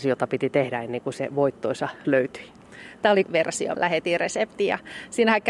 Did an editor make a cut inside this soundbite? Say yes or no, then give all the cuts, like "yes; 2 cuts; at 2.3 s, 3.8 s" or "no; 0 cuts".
yes; 3 cuts; at 2.0 s, 3.2 s, 3.7 s